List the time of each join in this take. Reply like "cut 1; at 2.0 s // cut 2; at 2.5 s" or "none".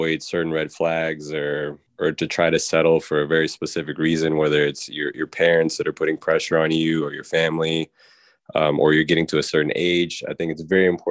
cut 1; at 1.9 s